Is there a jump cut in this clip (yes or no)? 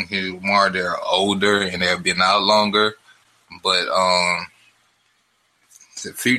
no